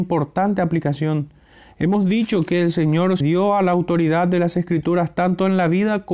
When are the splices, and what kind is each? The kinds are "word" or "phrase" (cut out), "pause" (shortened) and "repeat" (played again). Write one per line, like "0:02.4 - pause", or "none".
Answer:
0:03.2 - word